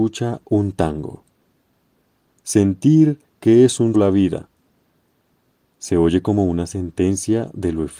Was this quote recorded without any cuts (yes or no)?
no